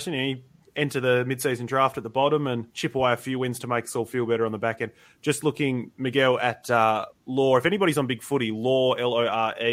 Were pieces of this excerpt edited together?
no; 0 cuts

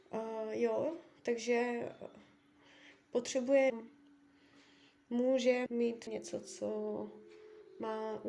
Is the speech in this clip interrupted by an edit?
yes; 3 cuts; at 3.7 s, 5.7 s, 6.1 s

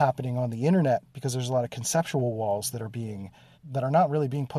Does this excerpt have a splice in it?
yes; 1 cut; at 3.5 s

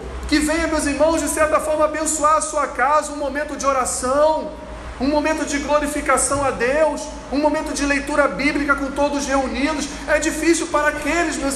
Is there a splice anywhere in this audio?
no; 0 cuts

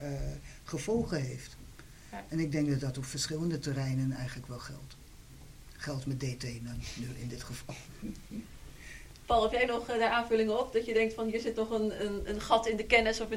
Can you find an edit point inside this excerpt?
no; 0 cuts

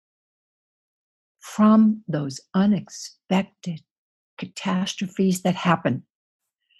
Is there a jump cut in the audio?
no; 0 cuts

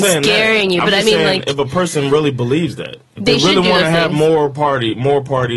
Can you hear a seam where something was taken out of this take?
no; 0 cuts

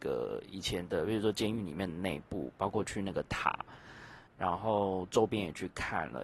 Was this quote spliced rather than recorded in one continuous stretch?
yes; 1 cut; at 4.3 s

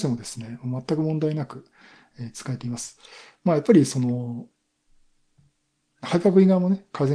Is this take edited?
no; 0 cuts

